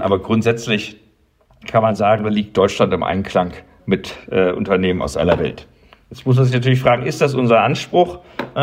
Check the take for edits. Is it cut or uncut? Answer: cut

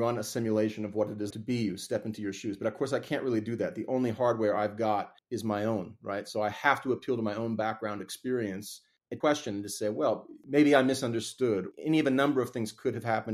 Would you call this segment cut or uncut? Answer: cut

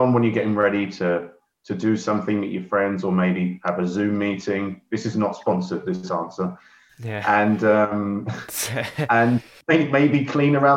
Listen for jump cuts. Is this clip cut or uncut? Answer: uncut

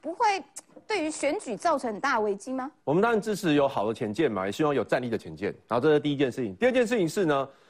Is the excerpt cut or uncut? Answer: cut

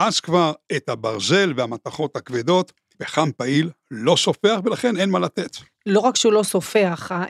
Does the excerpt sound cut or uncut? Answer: cut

